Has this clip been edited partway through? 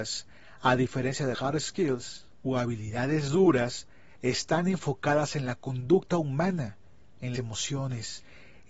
yes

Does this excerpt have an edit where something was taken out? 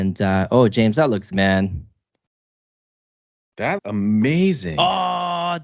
yes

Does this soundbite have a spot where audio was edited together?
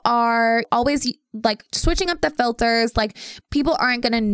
no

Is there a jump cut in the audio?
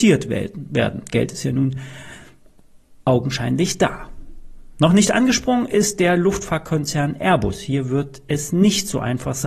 no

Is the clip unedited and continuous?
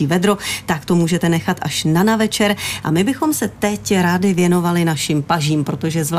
yes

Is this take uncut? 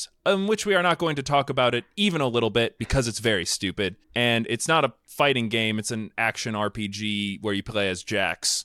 no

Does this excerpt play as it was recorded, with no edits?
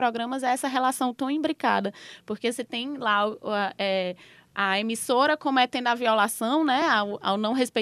yes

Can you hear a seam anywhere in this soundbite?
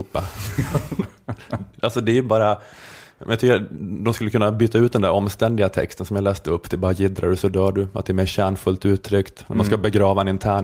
no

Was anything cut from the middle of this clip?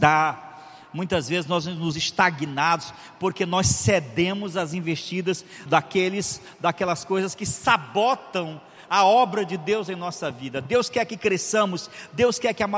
yes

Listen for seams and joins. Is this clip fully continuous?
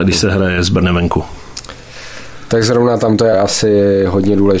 no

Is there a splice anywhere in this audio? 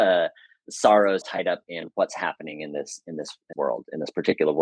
yes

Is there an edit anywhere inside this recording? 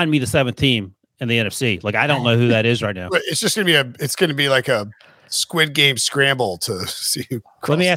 no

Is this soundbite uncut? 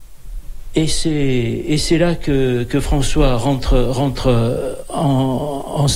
yes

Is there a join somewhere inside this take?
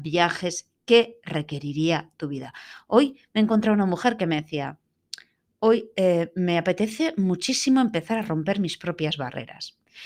no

